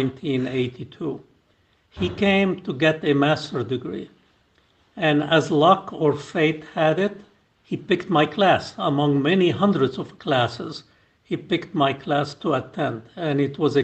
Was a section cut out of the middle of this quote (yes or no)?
no